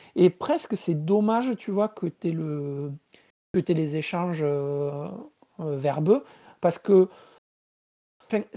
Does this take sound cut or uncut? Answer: uncut